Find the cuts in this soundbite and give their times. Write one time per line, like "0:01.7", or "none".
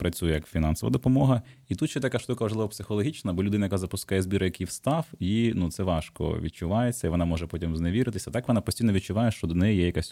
none